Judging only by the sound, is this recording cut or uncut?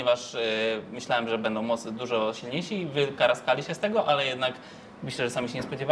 uncut